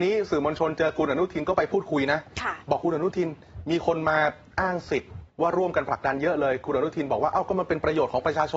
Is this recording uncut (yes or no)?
no